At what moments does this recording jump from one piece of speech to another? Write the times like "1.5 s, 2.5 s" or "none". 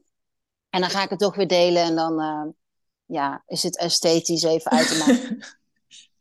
none